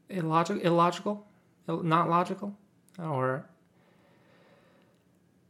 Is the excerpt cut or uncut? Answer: uncut